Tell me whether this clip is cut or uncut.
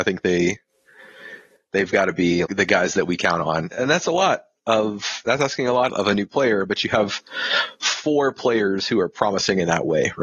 cut